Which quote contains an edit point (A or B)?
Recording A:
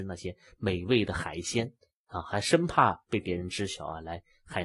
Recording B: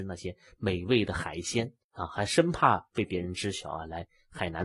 B